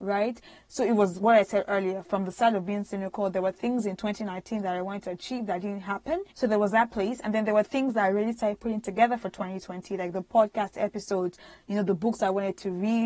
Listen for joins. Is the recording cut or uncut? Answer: cut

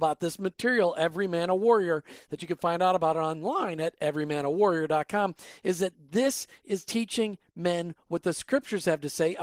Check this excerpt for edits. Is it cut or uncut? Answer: uncut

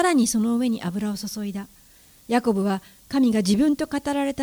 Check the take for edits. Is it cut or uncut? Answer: uncut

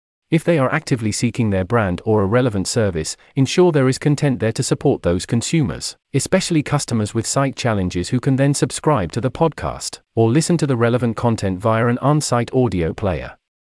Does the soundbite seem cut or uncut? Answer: cut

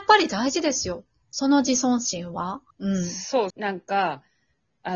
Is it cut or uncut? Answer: cut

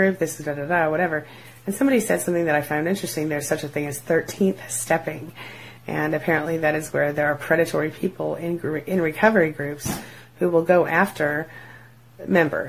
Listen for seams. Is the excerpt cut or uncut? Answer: uncut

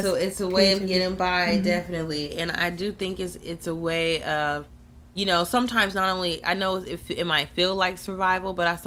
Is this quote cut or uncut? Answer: uncut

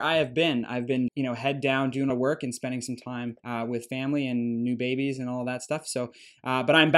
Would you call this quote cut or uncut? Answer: cut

